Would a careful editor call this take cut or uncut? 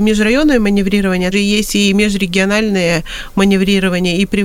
cut